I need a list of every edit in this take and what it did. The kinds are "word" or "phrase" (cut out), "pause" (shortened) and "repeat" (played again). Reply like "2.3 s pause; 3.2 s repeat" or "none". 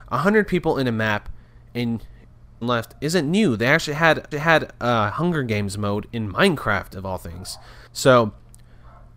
2.6 s phrase; 4.3 s repeat; 7.9 s pause